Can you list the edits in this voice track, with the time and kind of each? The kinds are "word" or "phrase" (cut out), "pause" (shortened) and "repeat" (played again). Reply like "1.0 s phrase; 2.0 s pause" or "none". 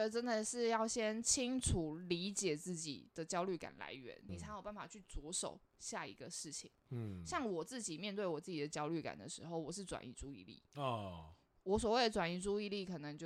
4.3 s word